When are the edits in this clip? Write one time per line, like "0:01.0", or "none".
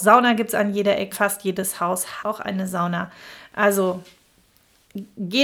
0:01.1
0:02.2

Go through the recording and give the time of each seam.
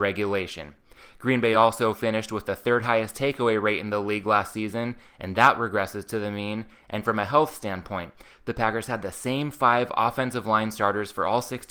none

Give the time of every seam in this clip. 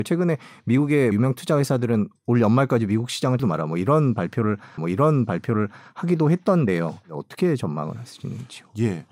0:01.1
0:03.4
0:04.8

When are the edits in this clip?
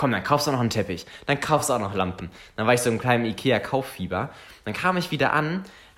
none

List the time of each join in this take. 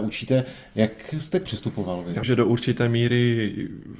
0:01.4
0:02.2

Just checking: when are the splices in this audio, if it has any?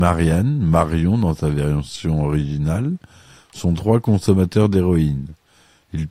none

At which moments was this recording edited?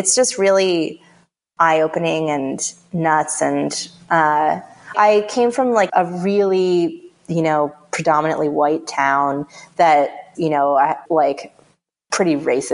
0:04.9
0:05.9
0:10.3
0:11.0

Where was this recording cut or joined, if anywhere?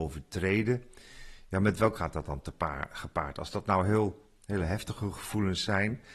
0:01.9

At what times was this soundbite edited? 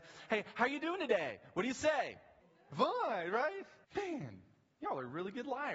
0:02.4
0:03.8

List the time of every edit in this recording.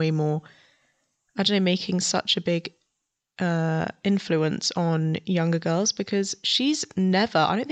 none

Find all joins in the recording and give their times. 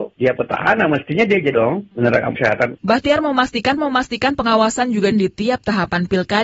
0:01.5
0:02.4
0:03.8
0:05.1

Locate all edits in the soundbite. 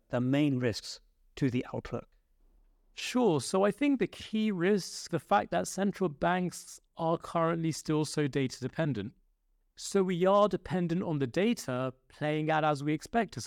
0:05.1

